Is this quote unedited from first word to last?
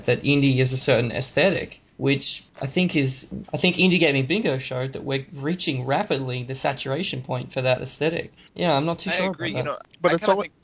no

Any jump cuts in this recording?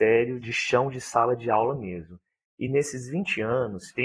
no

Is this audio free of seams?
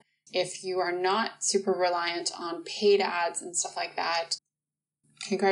yes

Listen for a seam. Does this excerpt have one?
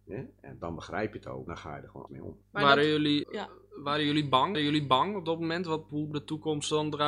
yes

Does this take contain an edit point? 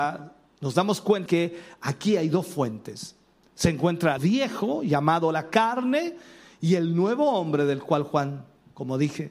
yes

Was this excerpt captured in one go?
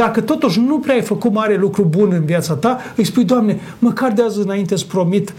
yes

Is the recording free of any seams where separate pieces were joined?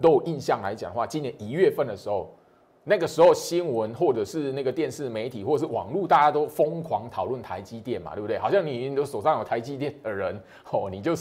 yes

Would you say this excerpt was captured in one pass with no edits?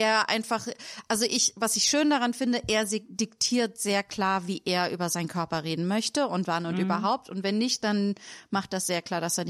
yes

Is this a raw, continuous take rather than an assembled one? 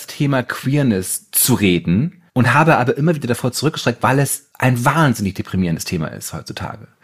no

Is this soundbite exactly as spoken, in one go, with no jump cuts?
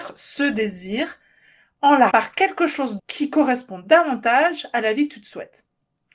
no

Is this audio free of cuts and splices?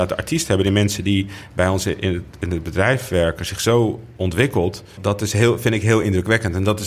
no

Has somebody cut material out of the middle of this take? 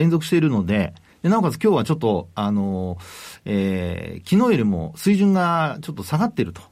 no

